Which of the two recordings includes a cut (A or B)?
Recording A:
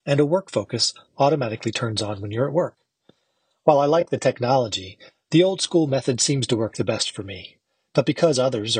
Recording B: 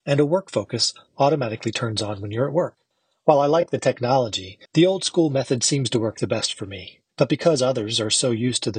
B